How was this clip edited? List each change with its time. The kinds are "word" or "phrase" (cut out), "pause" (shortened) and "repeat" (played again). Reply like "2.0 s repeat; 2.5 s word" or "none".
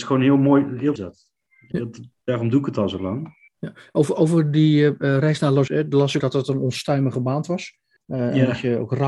1.0 s phrase; 1.7 s word; 3.5 s pause; 5.7 s word; 6.2 s word; 8.0 s pause